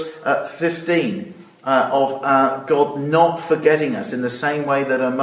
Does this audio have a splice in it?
no; 0 cuts

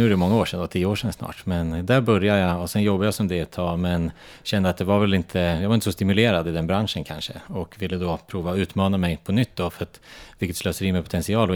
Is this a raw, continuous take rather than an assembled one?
yes; 0 cuts

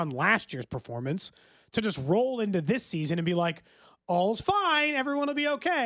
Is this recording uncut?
yes; 0 cuts

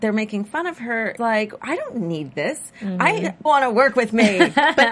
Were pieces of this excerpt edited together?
yes; 2 cuts; at 1.2 s, 3.5 s

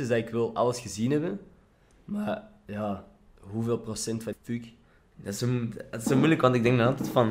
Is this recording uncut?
no; 2 cuts; at 3.3 s, 4.3 s

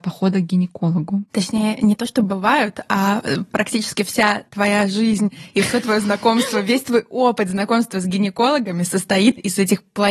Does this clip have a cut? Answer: yes; 1 cut; at 1.3 s

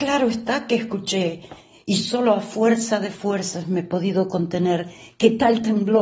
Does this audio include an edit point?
no; 0 cuts

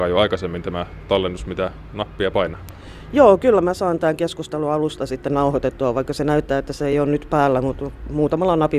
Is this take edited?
no; 0 cuts

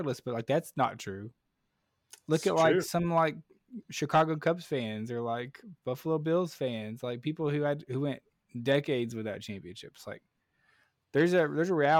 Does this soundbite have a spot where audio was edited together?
no; 0 cuts

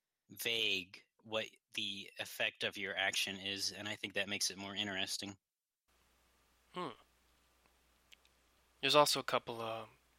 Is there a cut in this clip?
no; 0 cuts

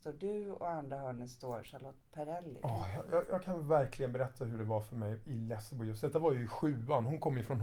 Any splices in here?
yes; 1 cut; at 3.3 s

